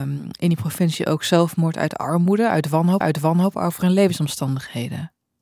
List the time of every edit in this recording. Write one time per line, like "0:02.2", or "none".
0:03.0